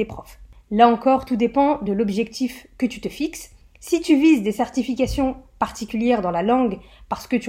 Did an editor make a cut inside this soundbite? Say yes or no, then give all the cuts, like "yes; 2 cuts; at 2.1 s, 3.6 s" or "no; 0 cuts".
no; 0 cuts